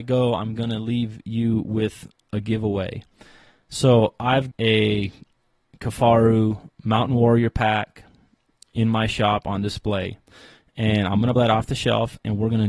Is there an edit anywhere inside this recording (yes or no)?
yes